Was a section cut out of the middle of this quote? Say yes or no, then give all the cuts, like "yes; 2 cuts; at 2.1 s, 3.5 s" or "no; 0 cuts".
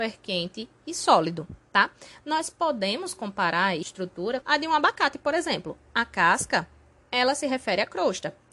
yes; 2 cuts; at 3.8 s, 4.4 s